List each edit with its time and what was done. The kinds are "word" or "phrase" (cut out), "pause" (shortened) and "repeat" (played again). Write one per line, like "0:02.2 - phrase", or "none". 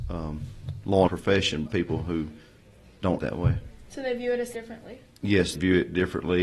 0:01.1 - word
0:01.7 - word
0:03.2 - word
0:04.5 - word
0:05.5 - word